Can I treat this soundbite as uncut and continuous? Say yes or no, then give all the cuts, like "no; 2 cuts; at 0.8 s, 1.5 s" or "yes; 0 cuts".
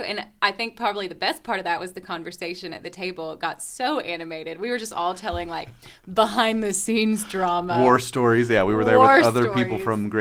yes; 0 cuts